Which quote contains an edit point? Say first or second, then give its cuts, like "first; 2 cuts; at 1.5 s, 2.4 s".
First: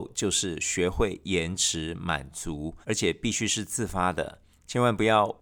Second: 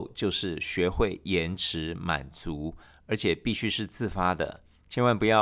first; 1 cut; at 2.8 s